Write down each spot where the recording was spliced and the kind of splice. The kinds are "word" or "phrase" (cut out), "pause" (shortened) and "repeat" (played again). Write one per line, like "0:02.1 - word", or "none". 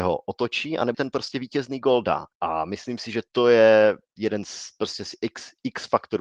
0:00.9 - word
0:02.3 - pause
0:03.3 - pause